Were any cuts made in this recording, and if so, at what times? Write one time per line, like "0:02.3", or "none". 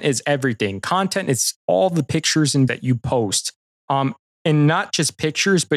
0:02.7